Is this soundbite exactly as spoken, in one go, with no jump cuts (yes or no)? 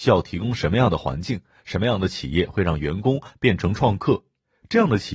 yes